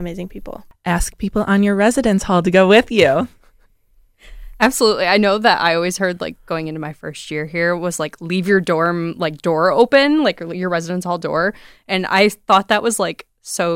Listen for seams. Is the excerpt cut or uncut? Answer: uncut